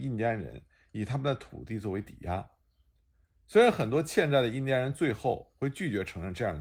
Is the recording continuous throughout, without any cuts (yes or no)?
yes